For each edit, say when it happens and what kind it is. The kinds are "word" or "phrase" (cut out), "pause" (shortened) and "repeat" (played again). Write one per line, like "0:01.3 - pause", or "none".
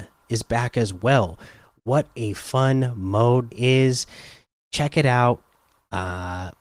0:03.5 - word